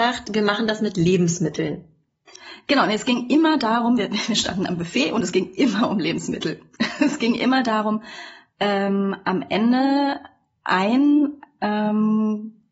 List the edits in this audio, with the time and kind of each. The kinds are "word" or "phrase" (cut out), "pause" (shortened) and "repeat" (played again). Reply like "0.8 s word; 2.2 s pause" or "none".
none